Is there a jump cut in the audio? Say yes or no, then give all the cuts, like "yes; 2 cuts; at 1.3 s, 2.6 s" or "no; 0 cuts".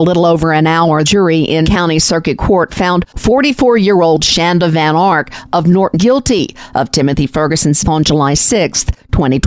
yes; 4 cuts; at 1.0 s, 1.6 s, 5.9 s, 7.8 s